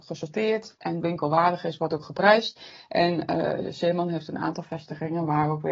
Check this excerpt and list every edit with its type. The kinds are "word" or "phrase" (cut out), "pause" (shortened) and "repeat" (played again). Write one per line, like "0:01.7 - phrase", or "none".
0:01.0 - phrase